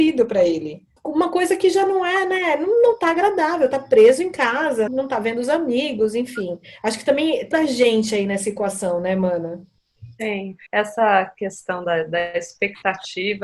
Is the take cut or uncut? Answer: cut